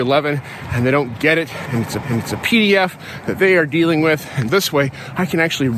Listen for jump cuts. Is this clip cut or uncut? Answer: cut